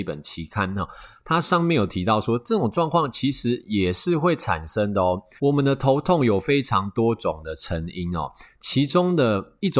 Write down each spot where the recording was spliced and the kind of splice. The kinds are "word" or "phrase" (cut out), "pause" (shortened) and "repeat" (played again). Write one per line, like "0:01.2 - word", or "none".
0:05.4 - pause